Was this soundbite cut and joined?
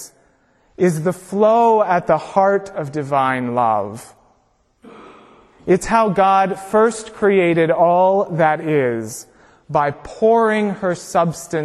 no; 0 cuts

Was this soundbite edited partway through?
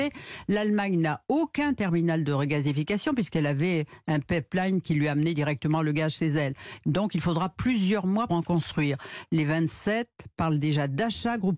yes; 1 cut; at 8.3 s

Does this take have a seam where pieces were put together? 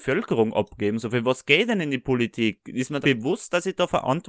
yes; 1 cut; at 3.0 s

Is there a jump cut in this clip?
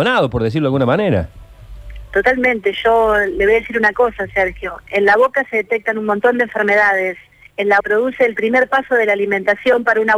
yes; 2 cuts; at 7.3 s, 7.8 s

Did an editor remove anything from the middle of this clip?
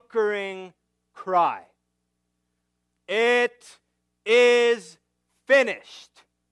no; 0 cuts

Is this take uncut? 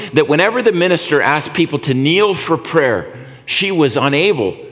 yes; 0 cuts

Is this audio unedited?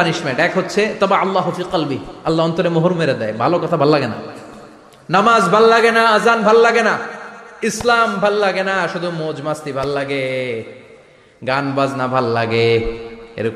yes; 0 cuts

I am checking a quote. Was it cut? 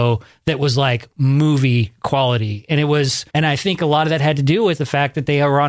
yes; 1 cut; at 3.3 s

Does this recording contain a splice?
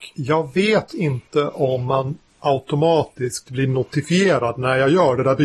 yes; 1 cut; at 2.3 s

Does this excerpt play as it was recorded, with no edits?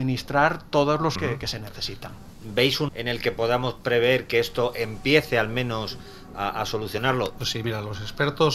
no; 2 cuts; at 1.2 s, 2.9 s

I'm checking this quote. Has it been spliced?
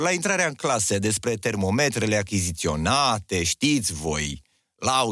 no; 0 cuts

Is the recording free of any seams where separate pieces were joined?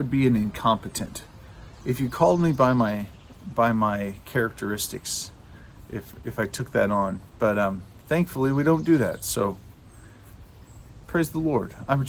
yes; 0 cuts

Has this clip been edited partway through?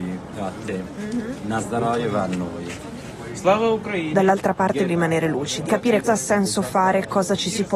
yes; 3 cuts; at 4.9 s, 5.7 s, 6.0 s

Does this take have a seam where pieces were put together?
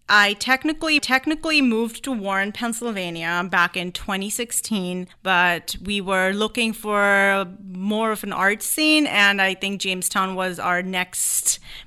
yes; 2 cuts; at 1.0 s, 5.1 s

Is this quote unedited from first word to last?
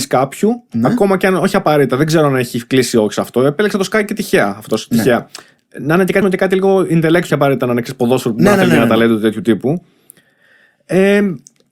no; 2 cuts; at 6.2 s, 7.3 s

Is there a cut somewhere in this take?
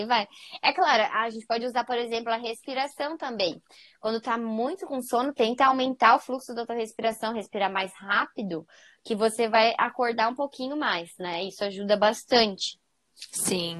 no; 0 cuts

